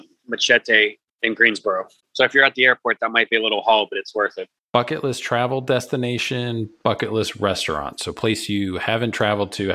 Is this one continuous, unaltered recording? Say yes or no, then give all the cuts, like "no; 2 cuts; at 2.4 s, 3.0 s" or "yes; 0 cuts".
yes; 0 cuts